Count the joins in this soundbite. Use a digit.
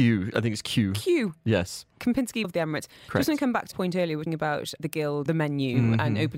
5